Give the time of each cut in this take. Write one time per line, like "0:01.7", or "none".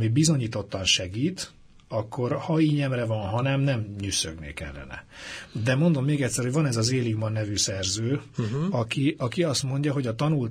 none